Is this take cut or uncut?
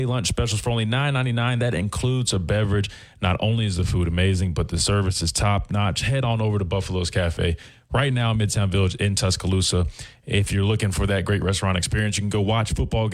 uncut